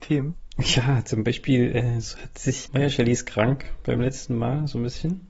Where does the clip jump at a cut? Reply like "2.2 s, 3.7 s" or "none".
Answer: 2.7 s